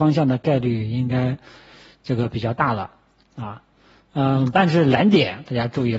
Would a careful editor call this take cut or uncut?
uncut